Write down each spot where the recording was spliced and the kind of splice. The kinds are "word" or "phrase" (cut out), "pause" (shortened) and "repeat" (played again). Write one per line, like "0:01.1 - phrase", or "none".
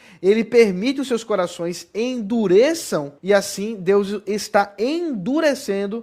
0:03.2 - pause